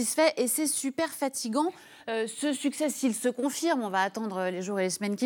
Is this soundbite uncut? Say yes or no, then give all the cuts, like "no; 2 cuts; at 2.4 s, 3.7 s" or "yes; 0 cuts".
yes; 0 cuts